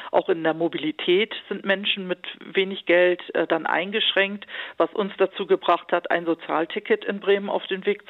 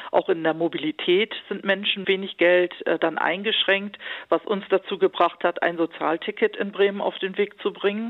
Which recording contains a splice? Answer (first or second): second